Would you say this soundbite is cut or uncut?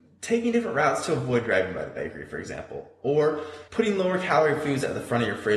cut